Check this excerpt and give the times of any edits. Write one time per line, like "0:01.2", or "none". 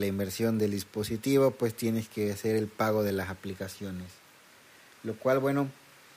none